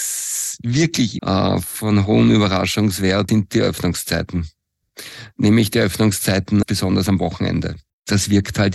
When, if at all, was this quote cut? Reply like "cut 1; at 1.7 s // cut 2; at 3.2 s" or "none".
cut 1; at 1.2 s // cut 2; at 3.3 s // cut 3; at 6.6 s